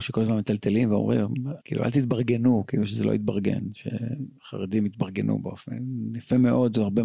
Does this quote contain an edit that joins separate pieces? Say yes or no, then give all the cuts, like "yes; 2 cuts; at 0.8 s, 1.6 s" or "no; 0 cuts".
yes; 1 cut; at 1.6 s